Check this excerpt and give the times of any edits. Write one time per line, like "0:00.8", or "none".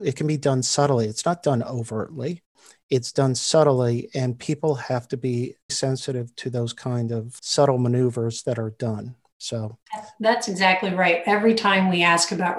0:05.7
0:07.4